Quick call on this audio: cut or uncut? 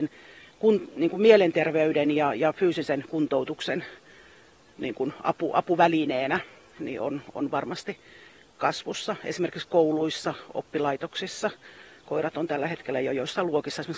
uncut